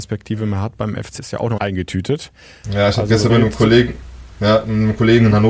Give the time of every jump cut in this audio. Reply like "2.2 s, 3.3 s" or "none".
1.2 s, 1.6 s, 3.3 s